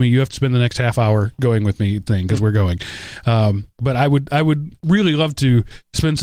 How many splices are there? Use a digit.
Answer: 1